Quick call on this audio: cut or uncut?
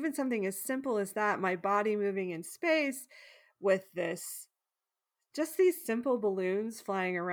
uncut